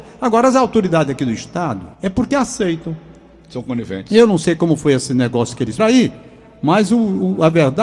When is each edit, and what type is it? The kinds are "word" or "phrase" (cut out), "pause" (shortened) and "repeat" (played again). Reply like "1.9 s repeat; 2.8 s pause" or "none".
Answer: 1.9 s pause; 5.8 s word